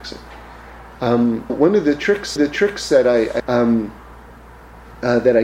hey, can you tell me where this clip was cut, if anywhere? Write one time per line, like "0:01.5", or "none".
0:01.5
0:02.4
0:03.4